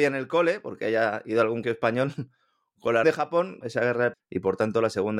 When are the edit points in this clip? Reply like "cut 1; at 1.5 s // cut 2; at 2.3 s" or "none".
cut 1; at 1.6 s // cut 2; at 3.0 s // cut 3; at 3.6 s // cut 4; at 4.1 s